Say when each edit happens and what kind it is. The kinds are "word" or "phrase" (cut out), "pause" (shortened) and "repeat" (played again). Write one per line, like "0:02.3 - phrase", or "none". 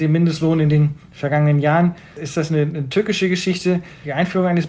none